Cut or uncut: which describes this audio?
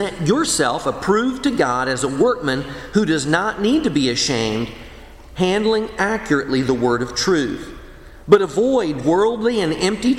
uncut